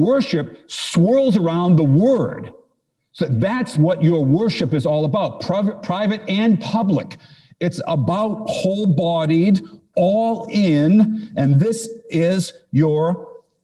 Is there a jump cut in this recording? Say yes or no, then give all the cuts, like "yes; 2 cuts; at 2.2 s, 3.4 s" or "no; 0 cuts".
no; 0 cuts